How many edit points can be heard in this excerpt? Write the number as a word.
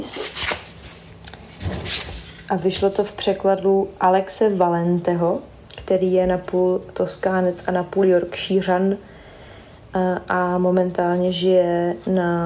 one